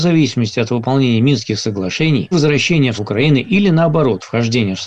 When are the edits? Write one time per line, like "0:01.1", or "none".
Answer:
0:02.3
0:03.0